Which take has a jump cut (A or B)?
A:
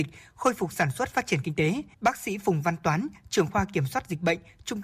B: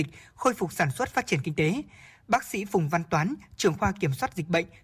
A